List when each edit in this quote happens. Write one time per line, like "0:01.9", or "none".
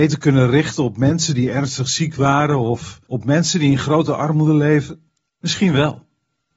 0:03.1
0:05.2